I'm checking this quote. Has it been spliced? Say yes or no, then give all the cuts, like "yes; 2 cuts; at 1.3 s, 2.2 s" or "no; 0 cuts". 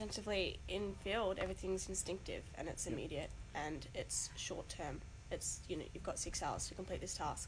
no; 0 cuts